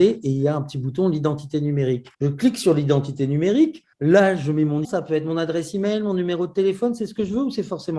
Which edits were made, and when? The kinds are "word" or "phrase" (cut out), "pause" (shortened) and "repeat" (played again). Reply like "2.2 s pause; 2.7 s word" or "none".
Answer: 2.1 s pause; 3.9 s pause; 4.8 s word

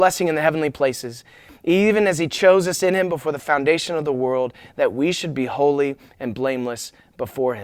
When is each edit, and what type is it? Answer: none

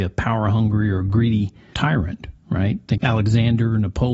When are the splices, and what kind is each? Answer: 1.7 s word; 3.0 s word

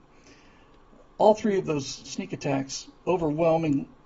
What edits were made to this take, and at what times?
2.0 s word

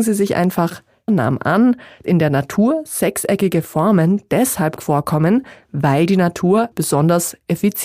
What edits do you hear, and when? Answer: 1.1 s word; 2.0 s word; 4.8 s word; 6.7 s word

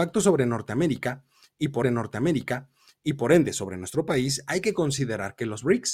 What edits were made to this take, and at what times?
1.8 s repeat

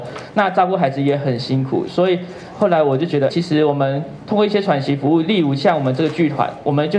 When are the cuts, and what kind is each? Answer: 3.3 s word

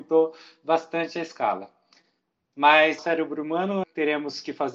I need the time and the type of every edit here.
3.0 s phrase; 3.8 s word

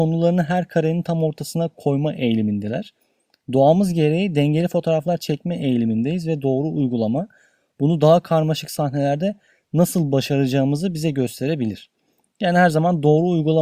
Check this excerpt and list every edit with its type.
none

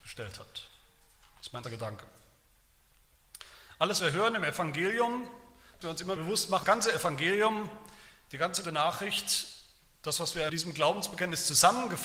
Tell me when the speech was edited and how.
1.6 s word; 4.0 s word; 5.8 s word; 6.2 s word; 6.6 s word; 8.6 s word; 10.5 s word

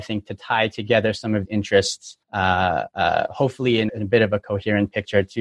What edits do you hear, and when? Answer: 1.4 s word; 2.2 s pause; 3.9 s word

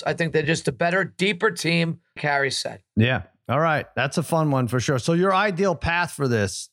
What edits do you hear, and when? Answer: 2.2 s word

